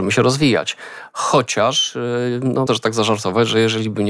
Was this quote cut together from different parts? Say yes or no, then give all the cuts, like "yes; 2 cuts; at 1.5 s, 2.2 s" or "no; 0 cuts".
yes; 1 cut; at 2.7 s